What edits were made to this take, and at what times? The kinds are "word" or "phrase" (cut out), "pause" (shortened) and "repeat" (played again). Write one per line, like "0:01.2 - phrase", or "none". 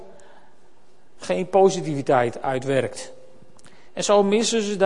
0:01.1 - pause
0:03.9 - pause